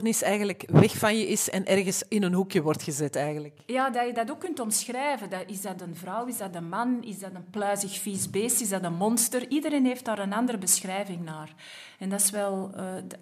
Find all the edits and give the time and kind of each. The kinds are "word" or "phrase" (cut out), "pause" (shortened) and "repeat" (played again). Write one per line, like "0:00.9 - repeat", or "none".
0:03.9 - word

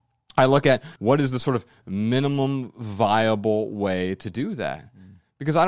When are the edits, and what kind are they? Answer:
0:01.0 - pause

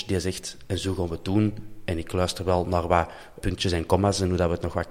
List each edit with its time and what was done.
0:03.4 - word

